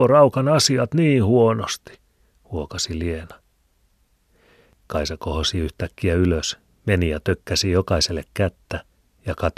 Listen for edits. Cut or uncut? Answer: uncut